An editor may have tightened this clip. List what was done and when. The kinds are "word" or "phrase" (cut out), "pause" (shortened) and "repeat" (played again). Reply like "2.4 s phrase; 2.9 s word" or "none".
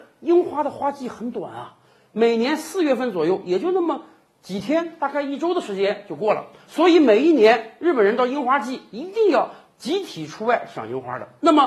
none